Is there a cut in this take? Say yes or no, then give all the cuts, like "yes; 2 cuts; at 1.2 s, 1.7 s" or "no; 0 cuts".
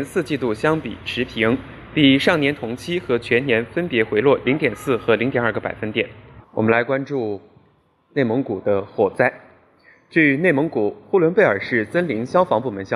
yes; 1 cut; at 6.4 s